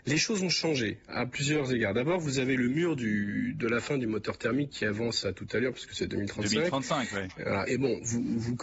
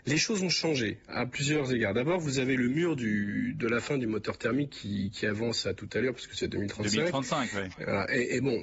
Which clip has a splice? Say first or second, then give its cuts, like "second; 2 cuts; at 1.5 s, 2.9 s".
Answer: first; 2 cuts; at 4.7 s, 7.7 s